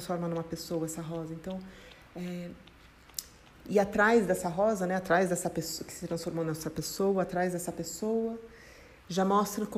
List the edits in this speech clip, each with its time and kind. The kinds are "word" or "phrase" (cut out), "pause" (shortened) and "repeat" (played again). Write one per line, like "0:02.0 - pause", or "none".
none